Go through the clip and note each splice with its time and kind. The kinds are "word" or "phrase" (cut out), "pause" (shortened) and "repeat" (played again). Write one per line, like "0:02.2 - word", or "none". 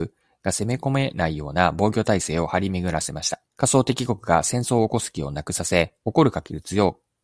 0:03.5 - pause